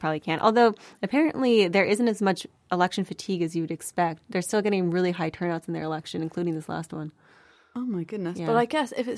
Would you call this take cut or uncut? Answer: uncut